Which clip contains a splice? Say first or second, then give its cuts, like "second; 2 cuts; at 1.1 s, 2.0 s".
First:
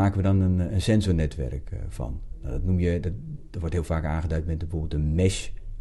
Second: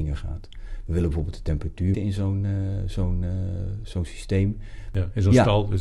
second; 1 cut; at 1.9 s